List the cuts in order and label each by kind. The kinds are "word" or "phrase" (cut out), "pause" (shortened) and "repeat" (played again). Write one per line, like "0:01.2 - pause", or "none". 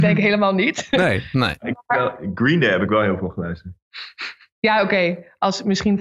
none